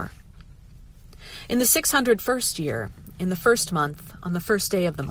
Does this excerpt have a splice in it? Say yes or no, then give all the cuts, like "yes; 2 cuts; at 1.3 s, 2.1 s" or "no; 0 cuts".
no; 0 cuts